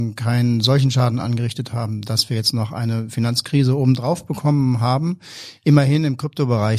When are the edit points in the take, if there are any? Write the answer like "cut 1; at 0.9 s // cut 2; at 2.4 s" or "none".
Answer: none